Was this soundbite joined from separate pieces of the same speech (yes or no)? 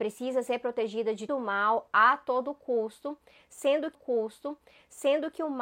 yes